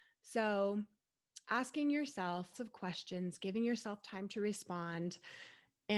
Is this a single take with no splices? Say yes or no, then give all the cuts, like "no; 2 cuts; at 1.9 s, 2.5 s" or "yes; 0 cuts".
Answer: no; 1 cut; at 2.5 s